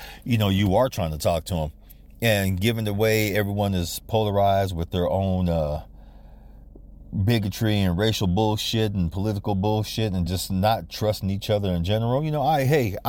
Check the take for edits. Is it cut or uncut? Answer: uncut